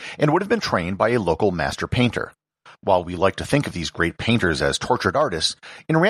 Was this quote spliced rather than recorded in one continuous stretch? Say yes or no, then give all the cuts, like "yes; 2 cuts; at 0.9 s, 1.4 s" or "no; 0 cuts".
no; 0 cuts